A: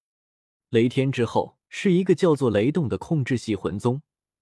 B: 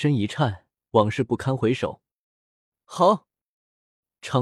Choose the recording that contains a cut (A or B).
A